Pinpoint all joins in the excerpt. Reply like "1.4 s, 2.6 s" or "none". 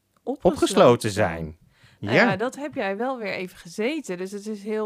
none